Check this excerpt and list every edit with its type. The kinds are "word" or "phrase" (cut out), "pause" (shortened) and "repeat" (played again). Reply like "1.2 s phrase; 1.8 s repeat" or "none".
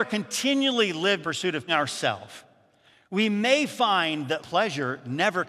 1.2 s word; 1.7 s word; 4.4 s word